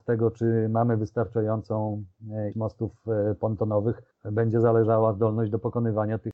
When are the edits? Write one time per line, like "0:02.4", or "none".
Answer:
0:02.5
0:04.1

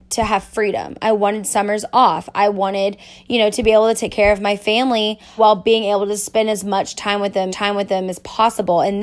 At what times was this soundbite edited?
0:05.4
0:07.5

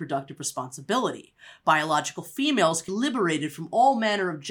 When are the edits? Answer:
0:02.9

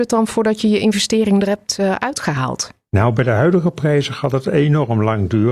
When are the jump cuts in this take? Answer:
none

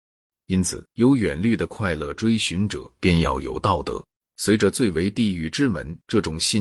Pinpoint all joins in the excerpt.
0:00.9
0:04.1

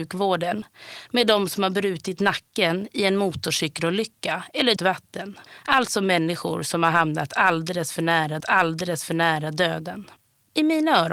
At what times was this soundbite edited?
0:04.8
0:08.4

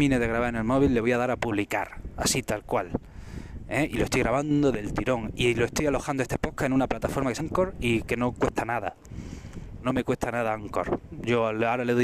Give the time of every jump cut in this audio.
0:07.4
0:09.8

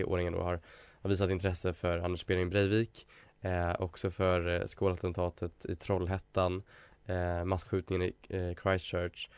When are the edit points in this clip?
none

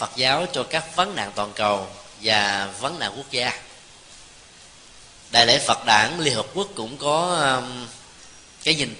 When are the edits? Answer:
none

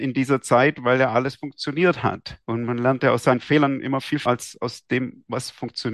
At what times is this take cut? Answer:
0:02.4
0:04.3

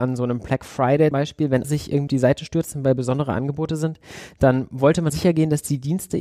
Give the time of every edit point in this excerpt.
0:01.1
0:01.6
0:02.1
0:05.1

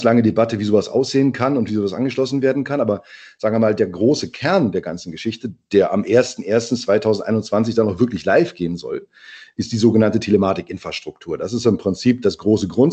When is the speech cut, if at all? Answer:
none

